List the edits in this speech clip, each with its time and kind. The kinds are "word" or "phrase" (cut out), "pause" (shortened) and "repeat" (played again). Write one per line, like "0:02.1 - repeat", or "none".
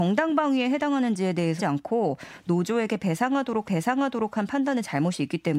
0:01.6 - word
0:03.6 - repeat

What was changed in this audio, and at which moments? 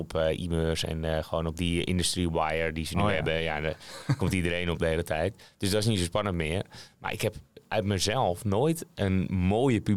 none

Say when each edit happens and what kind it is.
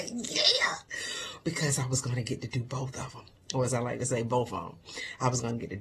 none

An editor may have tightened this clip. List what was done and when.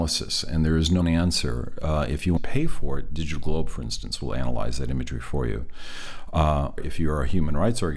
0:01.0 - word
0:02.4 - phrase
0:06.8 - word

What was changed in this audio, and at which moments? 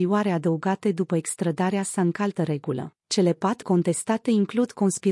0:02.4 - word
0:03.0 - pause
0:03.6 - word

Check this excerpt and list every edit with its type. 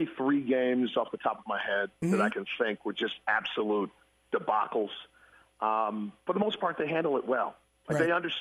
none

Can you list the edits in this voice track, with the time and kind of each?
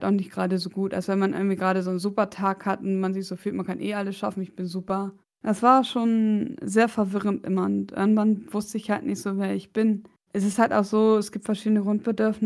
0:05.2 - pause
0:10.1 - pause

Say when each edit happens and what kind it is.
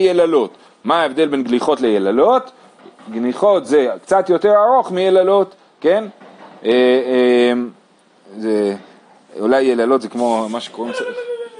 none

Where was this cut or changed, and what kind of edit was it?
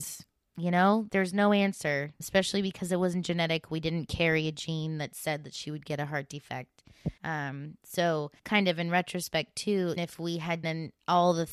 0:01.1 - word
0:02.2 - word
0:07.2 - pause
0:08.4 - pause
0:10.0 - word
0:10.6 - word

